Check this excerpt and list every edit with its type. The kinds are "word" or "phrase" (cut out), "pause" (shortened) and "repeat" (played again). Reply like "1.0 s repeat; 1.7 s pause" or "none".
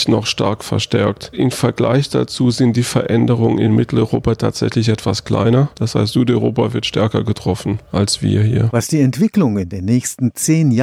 none